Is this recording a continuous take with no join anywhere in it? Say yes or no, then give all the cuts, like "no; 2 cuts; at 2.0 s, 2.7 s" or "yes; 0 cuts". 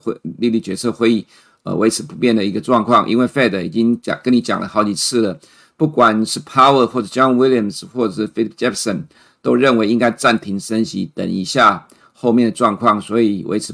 yes; 0 cuts